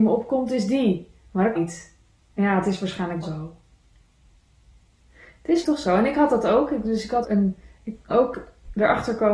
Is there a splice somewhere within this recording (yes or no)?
yes